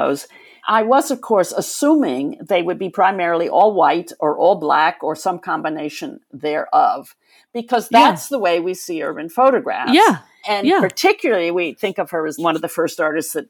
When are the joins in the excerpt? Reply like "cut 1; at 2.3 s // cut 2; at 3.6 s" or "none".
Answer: none

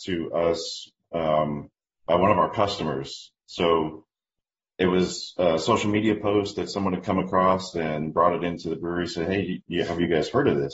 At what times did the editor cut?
none

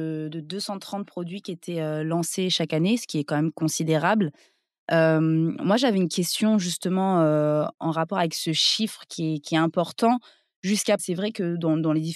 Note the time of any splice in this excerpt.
cut 1; at 11.0 s

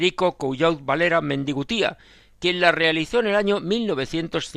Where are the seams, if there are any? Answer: none

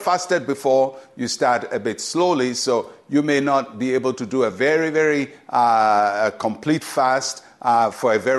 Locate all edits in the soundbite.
none

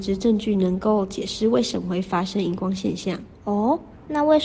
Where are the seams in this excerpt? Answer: cut 1; at 3.3 s

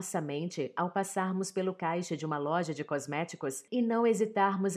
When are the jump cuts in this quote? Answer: none

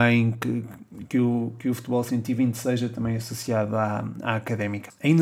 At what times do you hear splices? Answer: none

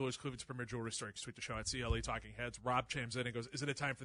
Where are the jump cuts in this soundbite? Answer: cut 1; at 1.2 s

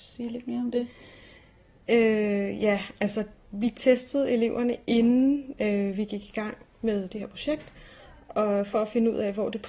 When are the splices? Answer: none

